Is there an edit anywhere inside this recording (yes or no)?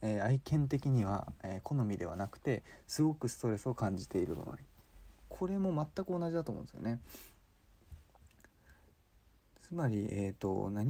no